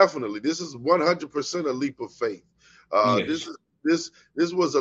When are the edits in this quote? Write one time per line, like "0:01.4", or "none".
none